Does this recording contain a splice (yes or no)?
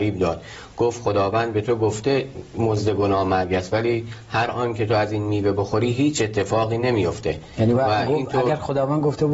no